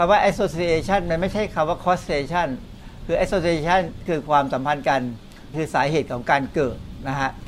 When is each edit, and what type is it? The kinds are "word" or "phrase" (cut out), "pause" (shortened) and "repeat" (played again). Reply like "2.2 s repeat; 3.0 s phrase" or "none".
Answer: 4.1 s word; 5.5 s word